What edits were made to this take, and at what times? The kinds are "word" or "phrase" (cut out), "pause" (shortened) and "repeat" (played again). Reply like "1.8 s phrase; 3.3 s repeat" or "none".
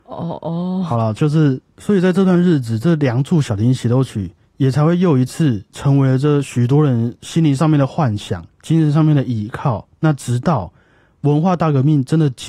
8.5 s pause